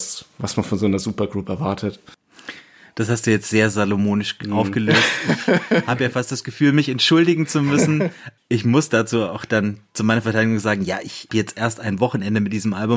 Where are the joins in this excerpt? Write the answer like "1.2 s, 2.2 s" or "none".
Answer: 8.4 s, 11.3 s